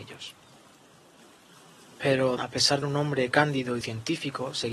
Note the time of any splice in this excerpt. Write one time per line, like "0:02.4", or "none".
0:02.4
0:02.8
0:03.8